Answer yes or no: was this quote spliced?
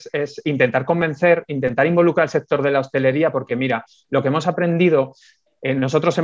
no